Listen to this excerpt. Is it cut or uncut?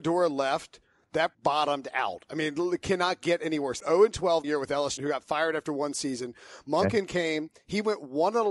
cut